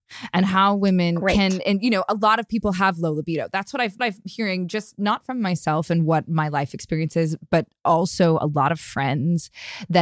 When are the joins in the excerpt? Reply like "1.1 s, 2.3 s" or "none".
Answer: 4.0 s

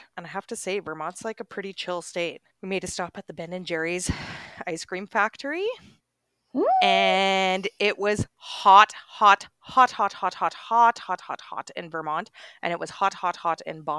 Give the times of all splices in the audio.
2.5 s, 11.2 s

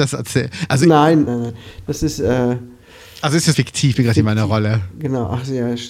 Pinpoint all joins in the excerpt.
1.3 s, 3.5 s, 3.9 s

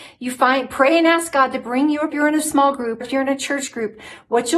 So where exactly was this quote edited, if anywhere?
2.1 s, 3.0 s

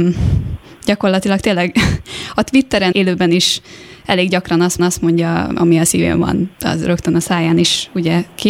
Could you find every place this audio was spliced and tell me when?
2.9 s, 4.8 s, 6.5 s

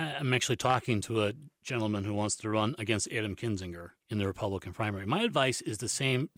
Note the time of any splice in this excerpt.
4.0 s

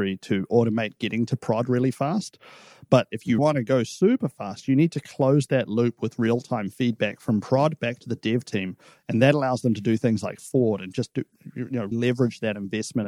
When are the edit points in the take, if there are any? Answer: 3.4 s, 10.4 s, 11.9 s

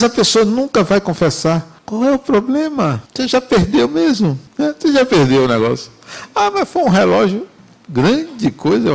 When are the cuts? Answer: 1.8 s, 3.1 s, 4.5 s

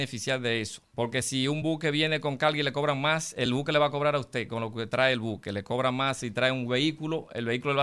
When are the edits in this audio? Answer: none

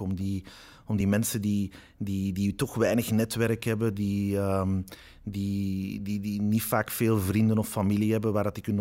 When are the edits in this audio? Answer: none

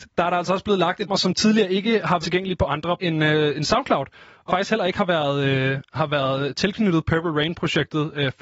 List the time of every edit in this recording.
1.1 s, 2.2 s, 3.0 s, 4.5 s

